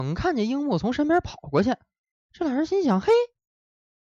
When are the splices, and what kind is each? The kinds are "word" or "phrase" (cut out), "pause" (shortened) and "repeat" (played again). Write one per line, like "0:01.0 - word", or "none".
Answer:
0:02.1 - pause